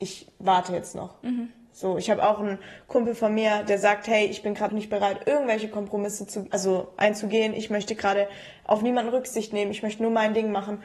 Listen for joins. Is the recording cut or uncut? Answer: cut